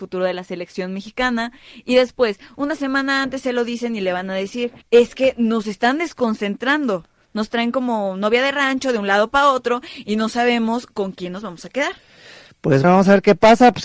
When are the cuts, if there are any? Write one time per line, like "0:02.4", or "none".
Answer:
0:04.8
0:12.8